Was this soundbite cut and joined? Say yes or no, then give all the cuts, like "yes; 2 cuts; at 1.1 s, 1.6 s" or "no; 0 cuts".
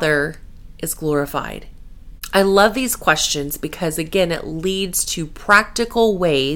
no; 0 cuts